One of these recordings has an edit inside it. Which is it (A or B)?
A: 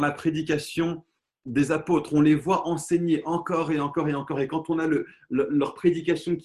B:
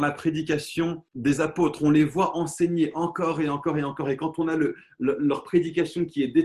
B